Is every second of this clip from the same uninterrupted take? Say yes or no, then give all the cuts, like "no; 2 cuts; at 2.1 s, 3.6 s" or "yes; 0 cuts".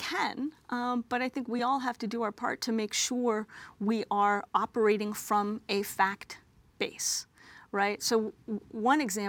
yes; 0 cuts